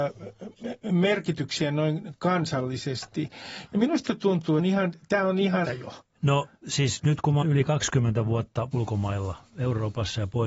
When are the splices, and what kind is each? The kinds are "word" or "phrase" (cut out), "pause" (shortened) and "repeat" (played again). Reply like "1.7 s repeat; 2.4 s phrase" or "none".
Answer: 4.6 s phrase; 5.6 s word; 7.4 s phrase; 8.7 s word